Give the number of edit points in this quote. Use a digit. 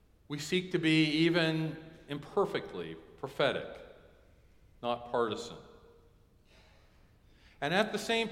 0